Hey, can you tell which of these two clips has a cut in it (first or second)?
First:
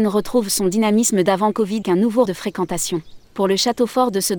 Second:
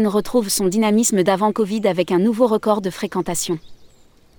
first